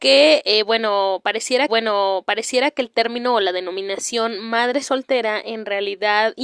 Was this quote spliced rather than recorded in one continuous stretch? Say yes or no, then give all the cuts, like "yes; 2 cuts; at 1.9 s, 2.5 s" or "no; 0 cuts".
yes; 1 cut; at 1.7 s